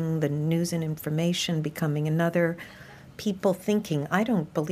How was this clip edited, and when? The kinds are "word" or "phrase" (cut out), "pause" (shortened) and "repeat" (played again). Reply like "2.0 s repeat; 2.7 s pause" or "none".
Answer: none